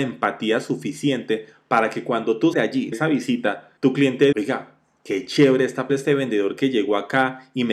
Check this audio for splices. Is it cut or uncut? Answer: cut